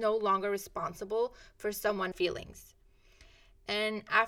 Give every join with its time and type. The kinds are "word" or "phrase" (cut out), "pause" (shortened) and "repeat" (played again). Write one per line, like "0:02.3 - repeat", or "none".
0:02.1 - word